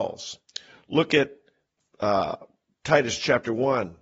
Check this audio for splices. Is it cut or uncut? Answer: uncut